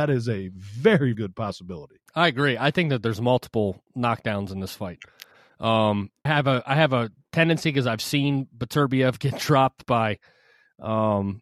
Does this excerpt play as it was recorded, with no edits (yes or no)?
no